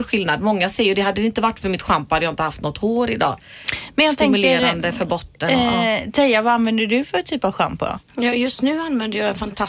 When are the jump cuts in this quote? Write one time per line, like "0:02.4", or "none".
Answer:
0:08.0